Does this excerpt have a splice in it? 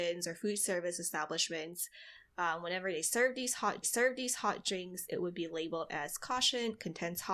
yes; 1 cut; at 3.8 s

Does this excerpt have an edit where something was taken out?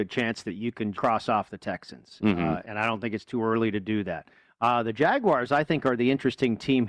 yes; 2 cuts; at 0.9 s, 2.6 s

